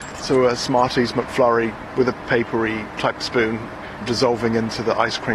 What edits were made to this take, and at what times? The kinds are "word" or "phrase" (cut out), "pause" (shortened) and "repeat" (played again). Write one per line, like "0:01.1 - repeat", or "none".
0:04.0 - word